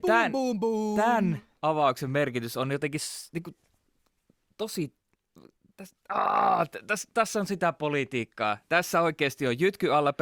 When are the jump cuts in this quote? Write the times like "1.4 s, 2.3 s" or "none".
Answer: none